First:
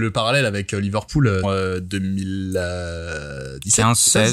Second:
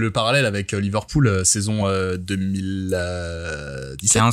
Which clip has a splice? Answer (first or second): first